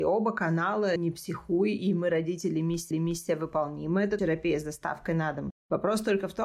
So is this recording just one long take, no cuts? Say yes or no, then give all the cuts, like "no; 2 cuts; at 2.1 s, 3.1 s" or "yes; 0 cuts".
no; 3 cuts; at 1.0 s, 2.9 s, 4.2 s